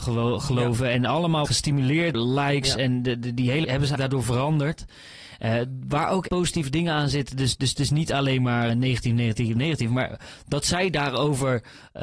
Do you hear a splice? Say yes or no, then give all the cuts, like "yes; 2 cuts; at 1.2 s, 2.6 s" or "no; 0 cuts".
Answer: yes; 6 cuts; at 1.5 s, 2.1 s, 3.6 s, 4.0 s, 6.3 s, 8.7 s